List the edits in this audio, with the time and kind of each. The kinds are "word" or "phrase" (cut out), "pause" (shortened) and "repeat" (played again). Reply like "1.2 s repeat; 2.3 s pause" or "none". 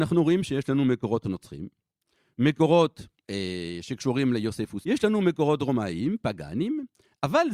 3.1 s pause; 4.8 s word